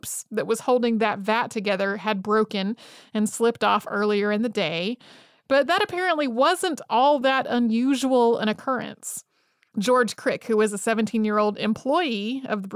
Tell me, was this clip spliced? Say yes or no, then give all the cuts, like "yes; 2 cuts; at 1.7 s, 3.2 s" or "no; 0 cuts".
no; 0 cuts